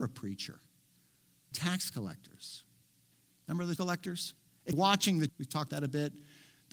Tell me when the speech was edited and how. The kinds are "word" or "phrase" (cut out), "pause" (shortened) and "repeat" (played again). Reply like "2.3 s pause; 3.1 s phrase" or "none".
1.5 s word; 3.8 s word; 4.7 s word; 5.3 s word; 5.7 s word